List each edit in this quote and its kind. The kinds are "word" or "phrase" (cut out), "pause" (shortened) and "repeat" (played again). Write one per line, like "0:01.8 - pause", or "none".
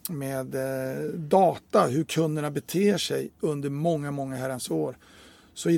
none